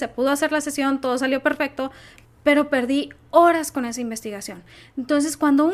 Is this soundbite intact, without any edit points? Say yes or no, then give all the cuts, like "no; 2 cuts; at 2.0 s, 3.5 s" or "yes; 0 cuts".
yes; 0 cuts